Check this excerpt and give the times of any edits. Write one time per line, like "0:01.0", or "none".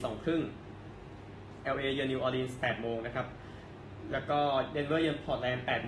none